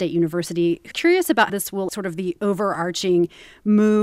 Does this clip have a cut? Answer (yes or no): yes